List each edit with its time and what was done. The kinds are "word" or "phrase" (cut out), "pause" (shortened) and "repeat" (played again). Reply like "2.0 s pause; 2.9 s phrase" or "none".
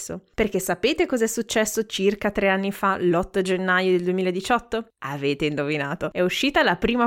none

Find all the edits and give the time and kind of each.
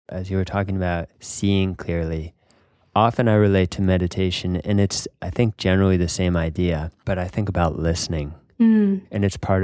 none

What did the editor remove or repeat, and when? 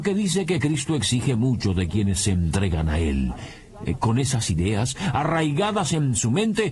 none

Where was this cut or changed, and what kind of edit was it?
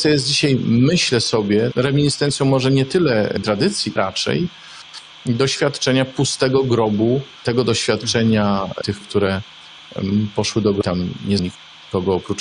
3.4 s word; 4.0 s word; 9.0 s word; 11.4 s word

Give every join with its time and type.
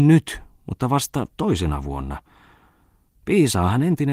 none

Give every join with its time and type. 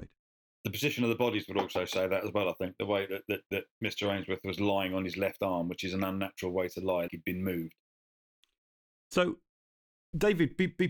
3.5 s word; 7.1 s word

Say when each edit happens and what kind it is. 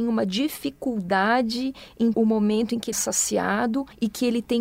2.1 s word; 2.9 s word

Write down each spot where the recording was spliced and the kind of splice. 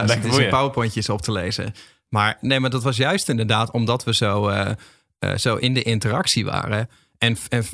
none

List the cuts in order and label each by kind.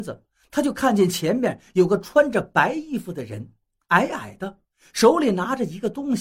none

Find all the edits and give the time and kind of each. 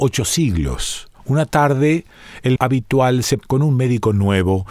1.1 s pause; 2.6 s word; 3.4 s word

